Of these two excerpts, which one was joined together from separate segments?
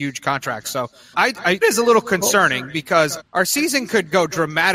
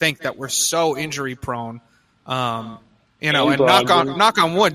first; 3 cuts; at 1.1 s, 1.6 s, 3.2 s

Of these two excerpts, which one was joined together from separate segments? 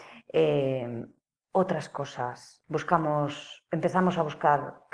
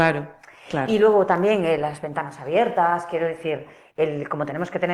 first; 1 cut; at 2.6 s

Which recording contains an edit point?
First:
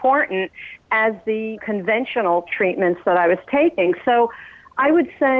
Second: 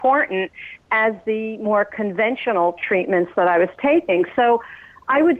first; 1 cut; at 1.6 s

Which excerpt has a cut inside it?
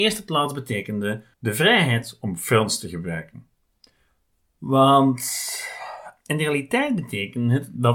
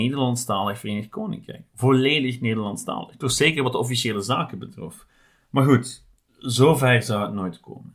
first; 1 cut; at 1.3 s

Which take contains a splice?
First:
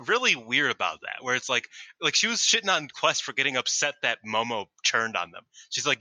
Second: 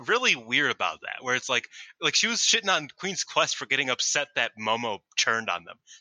first; 1 cut; at 2.9 s

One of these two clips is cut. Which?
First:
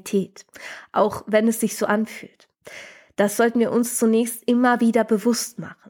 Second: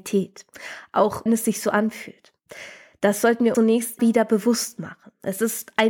second; 3 cuts; at 1.3 s, 3.5 s, 4.0 s

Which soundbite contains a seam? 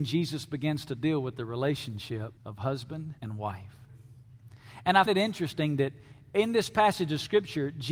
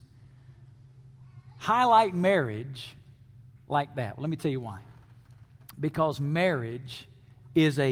first; 3 cuts; at 2.4 s, 3.2 s, 5.1 s

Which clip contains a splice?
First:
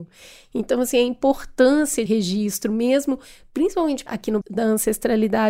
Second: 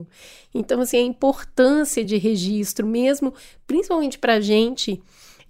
first; 3 cuts; at 2.1 s, 4.1 s, 4.4 s

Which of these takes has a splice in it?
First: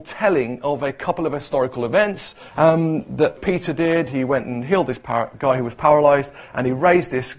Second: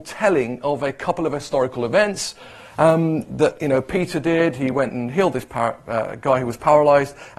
first; 3 cuts; at 2.5 s, 3.4 s, 5.3 s

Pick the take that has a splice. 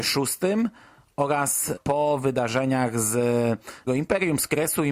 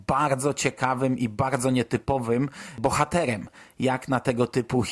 first; 2 cuts; at 1.8 s, 3.9 s

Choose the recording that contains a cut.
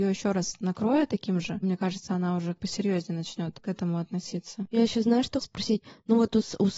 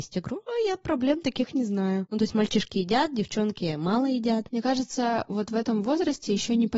first; 3 cuts; at 1.6 s, 2.6 s, 5.4 s

